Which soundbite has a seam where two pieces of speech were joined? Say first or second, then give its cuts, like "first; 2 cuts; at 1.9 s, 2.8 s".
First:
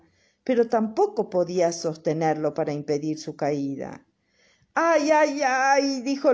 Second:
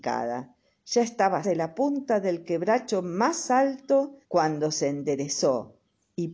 second; 2 cuts; at 1.4 s, 4.2 s